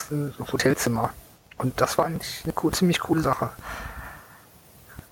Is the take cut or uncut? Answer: uncut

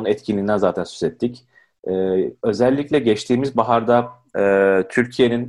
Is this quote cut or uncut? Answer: uncut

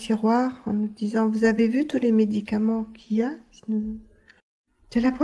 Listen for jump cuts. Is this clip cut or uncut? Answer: uncut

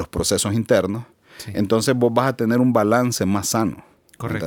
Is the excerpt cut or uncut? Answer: uncut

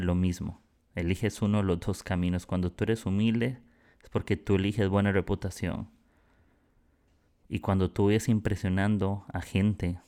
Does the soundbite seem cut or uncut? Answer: uncut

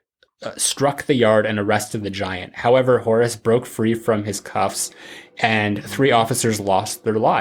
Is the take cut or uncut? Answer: uncut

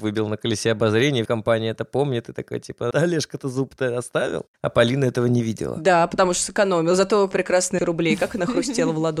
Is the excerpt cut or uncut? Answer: cut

